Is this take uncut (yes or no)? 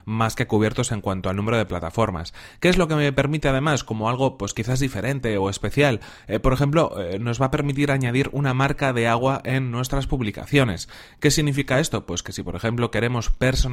yes